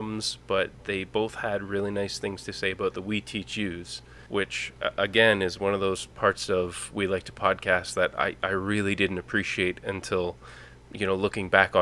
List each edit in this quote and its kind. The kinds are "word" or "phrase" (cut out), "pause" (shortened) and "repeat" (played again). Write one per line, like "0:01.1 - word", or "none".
0:04.3 - pause
0:06.1 - pause

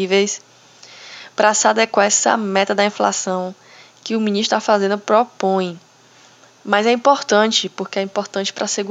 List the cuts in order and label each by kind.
none

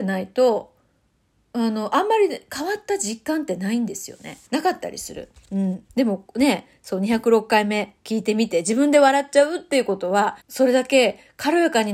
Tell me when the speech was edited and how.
0:04.5 - pause
0:10.4 - pause

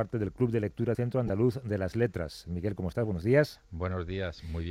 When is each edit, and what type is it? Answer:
0:00.9 - word

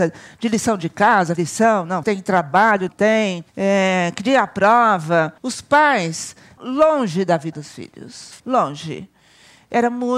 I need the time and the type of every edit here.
0:01.4 - word
0:02.0 - word
0:02.9 - word
0:03.5 - pause
0:05.4 - pause
0:06.6 - word
0:07.5 - word
0:08.4 - pause

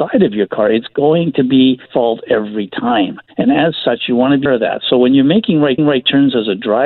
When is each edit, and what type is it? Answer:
0:01.9 - word
0:03.3 - pause
0:04.5 - word
0:05.8 - repeat

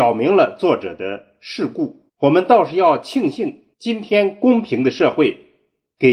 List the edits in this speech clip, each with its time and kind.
0:02.1 - pause
0:03.7 - pause

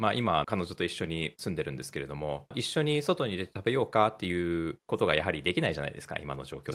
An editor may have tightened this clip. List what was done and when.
0:04.8 - pause

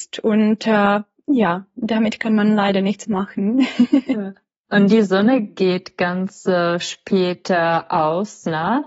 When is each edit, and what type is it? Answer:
none

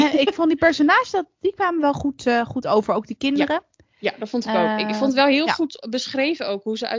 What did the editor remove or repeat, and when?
none

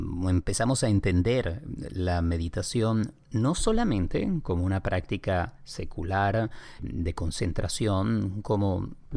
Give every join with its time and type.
0:06.8 - word

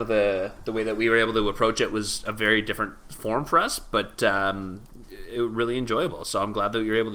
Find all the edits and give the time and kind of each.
none

